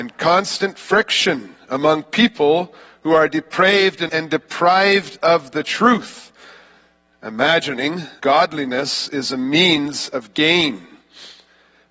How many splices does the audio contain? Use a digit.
2